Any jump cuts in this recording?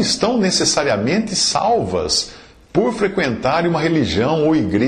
no; 0 cuts

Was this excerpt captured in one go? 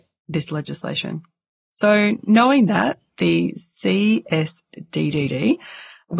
yes; 0 cuts

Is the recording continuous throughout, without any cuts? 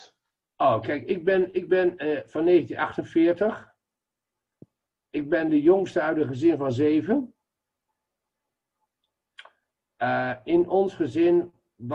yes; 0 cuts

